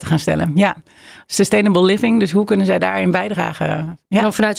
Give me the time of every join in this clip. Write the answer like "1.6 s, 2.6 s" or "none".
none